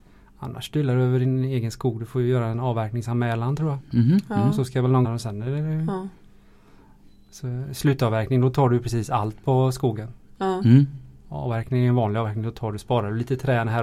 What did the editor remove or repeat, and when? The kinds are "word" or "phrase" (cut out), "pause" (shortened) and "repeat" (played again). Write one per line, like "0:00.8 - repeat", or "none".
0:05.0 - word